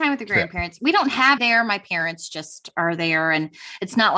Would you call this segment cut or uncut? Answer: cut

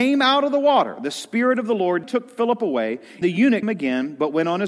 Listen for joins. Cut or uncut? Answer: cut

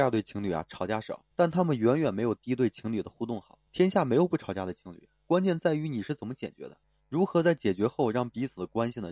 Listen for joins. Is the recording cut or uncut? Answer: cut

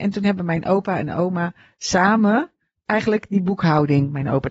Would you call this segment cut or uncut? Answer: uncut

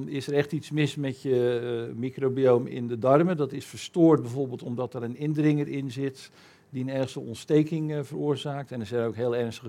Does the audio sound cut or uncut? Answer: uncut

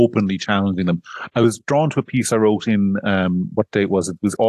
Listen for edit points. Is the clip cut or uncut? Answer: uncut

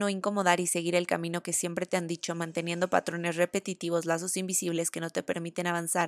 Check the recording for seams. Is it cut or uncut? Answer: uncut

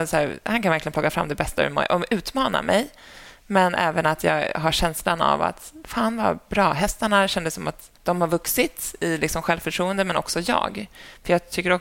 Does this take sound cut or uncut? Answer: cut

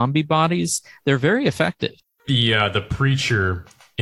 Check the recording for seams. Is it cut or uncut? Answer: cut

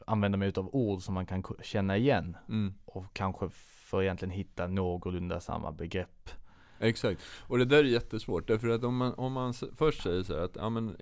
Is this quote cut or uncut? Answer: uncut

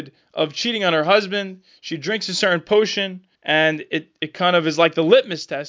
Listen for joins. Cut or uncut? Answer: cut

